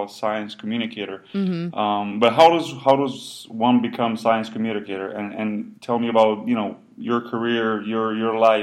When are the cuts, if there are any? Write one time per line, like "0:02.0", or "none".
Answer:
0:05.8